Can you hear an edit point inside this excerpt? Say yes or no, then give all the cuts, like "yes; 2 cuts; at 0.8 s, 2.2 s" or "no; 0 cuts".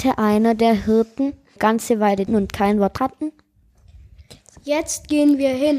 yes; 3 cuts; at 1.6 s, 2.3 s, 3.0 s